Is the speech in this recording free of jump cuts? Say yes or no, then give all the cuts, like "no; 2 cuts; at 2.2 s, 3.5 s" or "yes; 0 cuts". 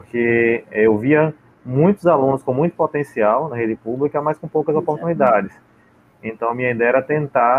yes; 0 cuts